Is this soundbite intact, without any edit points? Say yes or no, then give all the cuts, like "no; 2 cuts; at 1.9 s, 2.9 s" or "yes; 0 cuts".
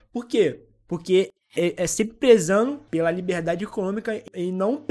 yes; 0 cuts